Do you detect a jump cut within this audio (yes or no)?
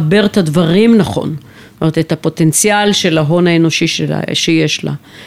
no